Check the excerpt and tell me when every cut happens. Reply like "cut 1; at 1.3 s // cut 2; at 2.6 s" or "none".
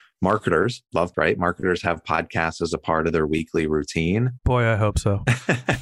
cut 1; at 1.1 s